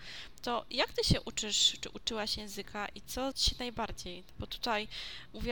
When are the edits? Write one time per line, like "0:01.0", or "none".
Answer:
0:03.3